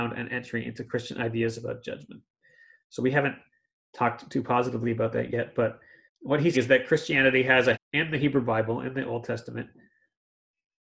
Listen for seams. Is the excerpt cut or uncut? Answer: cut